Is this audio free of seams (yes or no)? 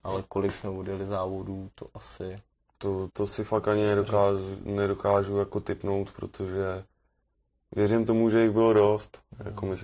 no